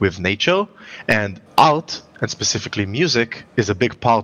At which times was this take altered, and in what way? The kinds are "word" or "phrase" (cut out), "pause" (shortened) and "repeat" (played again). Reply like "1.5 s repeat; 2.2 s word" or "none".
1.5 s pause